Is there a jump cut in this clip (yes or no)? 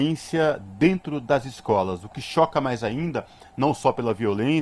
no